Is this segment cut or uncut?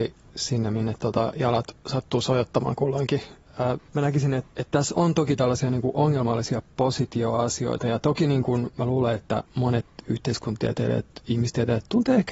cut